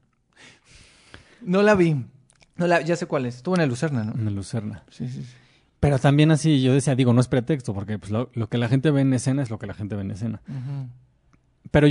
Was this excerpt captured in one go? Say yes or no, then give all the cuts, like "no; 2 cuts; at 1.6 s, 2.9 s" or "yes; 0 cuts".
yes; 0 cuts